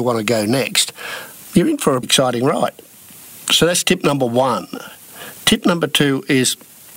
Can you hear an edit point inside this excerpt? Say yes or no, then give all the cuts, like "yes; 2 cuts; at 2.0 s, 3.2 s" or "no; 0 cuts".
yes; 1 cut; at 2.0 s